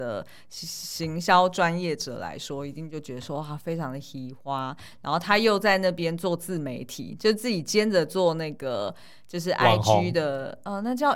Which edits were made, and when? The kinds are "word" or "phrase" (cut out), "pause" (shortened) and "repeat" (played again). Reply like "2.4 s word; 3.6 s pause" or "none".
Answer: none